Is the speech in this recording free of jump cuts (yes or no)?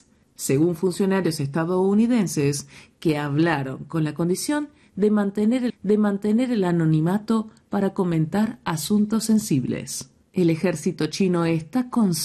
no